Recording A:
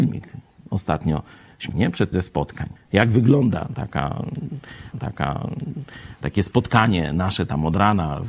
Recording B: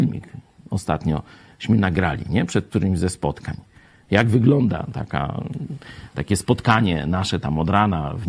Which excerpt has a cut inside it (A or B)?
A